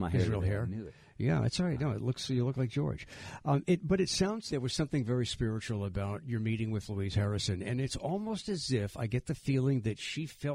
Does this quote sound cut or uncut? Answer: cut